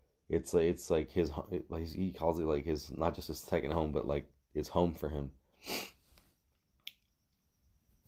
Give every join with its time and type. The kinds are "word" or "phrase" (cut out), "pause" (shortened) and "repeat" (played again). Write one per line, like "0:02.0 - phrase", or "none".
none